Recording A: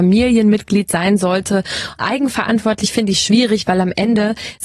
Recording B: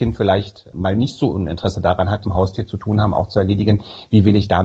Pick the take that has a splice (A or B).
B